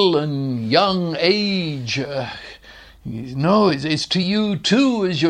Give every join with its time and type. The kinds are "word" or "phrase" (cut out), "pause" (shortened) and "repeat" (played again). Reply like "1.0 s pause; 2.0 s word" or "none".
none